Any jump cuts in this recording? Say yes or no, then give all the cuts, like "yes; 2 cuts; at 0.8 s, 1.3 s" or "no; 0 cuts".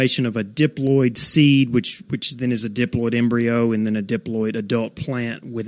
no; 0 cuts